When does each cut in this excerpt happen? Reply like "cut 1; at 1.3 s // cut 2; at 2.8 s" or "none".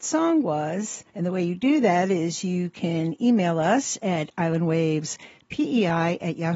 cut 1; at 1.1 s